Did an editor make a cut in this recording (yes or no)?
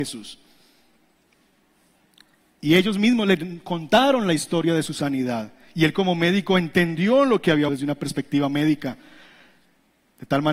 yes